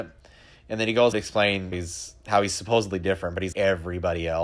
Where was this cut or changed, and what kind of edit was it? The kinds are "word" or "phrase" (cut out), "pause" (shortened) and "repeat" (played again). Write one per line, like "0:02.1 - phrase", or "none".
0:01.1 - word
0:01.7 - word
0:03.5 - word